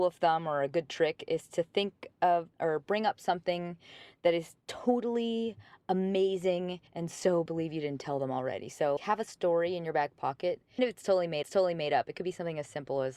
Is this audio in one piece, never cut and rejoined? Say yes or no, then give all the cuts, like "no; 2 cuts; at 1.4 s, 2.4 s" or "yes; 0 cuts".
no; 7 cuts; at 2.5 s, 4.6 s, 6.9 s, 7.5 s, 9.0 s, 10.8 s, 11.4 s